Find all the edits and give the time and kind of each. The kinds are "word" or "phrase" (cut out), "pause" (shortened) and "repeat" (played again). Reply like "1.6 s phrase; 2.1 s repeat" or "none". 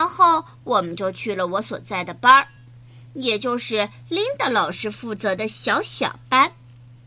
none